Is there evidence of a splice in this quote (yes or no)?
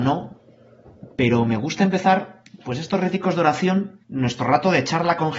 yes